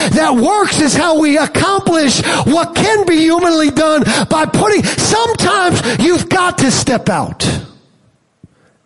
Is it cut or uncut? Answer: uncut